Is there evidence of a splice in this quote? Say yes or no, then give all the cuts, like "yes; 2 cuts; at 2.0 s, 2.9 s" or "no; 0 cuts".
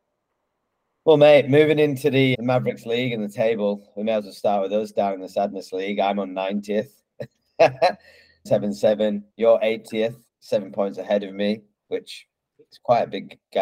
yes; 4 cuts; at 2.3 s, 8.5 s, 9.3 s, 10.3 s